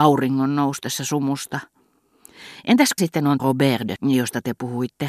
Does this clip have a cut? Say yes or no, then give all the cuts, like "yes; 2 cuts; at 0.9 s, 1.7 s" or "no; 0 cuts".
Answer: yes; 3 cuts; at 3.0 s, 3.4 s, 4.0 s